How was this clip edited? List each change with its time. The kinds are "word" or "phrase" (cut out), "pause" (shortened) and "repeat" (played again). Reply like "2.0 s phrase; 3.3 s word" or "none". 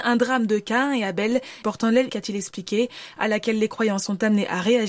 1.6 s phrase; 2.1 s phrase